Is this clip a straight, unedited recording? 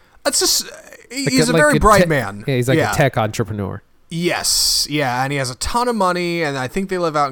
yes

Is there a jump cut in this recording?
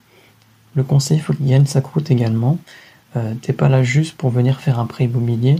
no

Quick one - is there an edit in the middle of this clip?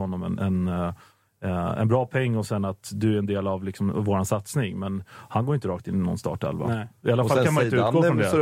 no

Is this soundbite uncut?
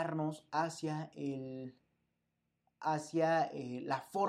yes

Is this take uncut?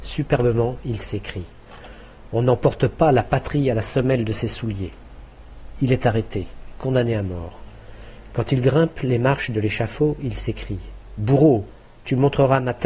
yes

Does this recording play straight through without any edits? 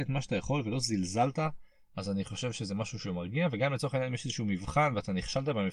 yes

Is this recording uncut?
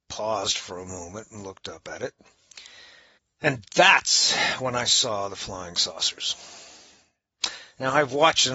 no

